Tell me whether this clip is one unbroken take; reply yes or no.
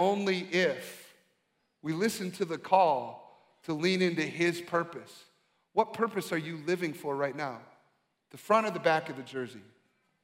yes